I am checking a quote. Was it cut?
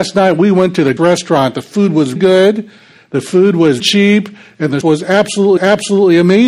yes; 5 cuts; at 1.0 s, 2.2 s, 3.8 s, 4.8 s, 5.6 s

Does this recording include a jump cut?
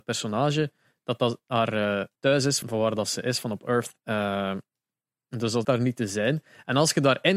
yes; 4 cuts; at 2.2 s, 2.6 s, 4.0 s, 5.6 s

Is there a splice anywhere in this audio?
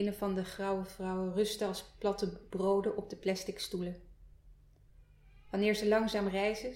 no; 0 cuts

